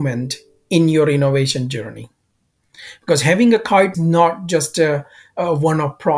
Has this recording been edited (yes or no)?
yes